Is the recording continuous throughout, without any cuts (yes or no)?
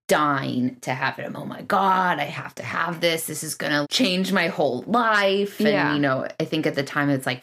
no